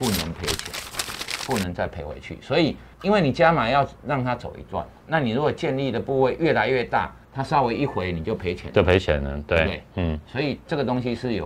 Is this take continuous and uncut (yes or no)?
no